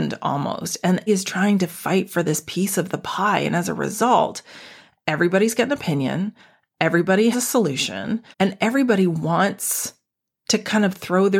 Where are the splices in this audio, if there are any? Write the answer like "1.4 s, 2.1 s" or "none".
1.1 s, 7.3 s, 8.3 s